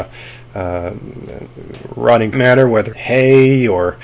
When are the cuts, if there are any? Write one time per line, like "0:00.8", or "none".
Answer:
0:02.3
0:02.9